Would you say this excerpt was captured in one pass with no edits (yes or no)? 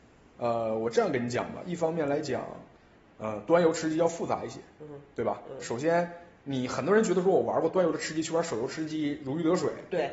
yes